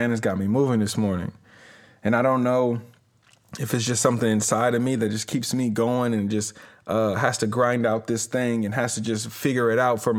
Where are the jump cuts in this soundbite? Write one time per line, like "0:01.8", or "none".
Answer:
none